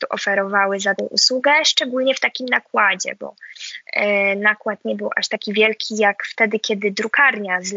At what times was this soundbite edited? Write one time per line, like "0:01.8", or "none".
0:01.0